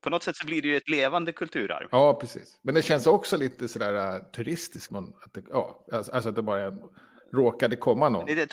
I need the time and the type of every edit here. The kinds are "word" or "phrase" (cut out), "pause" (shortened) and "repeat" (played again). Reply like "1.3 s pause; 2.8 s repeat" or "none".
4.9 s word